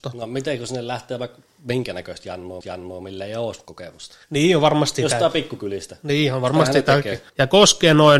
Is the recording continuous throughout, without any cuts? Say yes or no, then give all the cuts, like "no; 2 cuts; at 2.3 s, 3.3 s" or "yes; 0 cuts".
no; 3 cuts; at 2.6 s, 4.2 s, 7.3 s